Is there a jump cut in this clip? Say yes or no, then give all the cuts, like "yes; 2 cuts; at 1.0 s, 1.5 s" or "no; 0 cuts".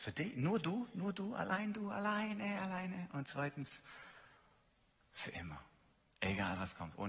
no; 0 cuts